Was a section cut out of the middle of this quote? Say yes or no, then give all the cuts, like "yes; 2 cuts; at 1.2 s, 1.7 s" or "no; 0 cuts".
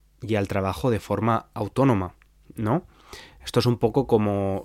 no; 0 cuts